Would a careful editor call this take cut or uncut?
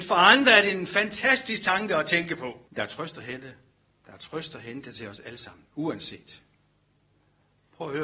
cut